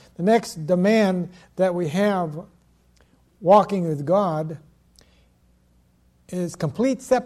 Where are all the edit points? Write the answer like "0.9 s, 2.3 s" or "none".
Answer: none